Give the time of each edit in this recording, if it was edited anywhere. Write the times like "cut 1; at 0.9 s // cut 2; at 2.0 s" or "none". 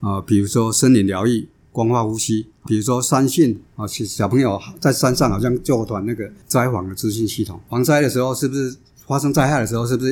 cut 1; at 2.7 s